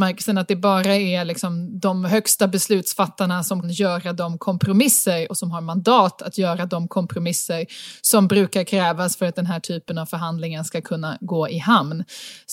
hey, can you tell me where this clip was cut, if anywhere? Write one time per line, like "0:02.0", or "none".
0:03.6